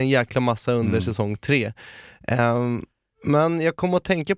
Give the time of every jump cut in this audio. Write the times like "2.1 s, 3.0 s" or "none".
none